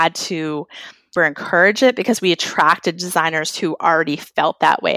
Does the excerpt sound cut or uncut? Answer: cut